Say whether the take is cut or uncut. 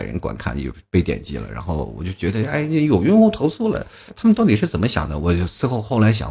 cut